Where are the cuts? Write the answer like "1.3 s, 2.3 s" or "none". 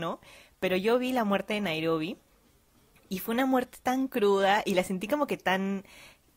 none